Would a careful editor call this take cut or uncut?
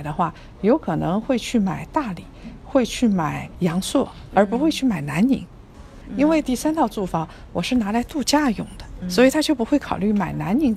cut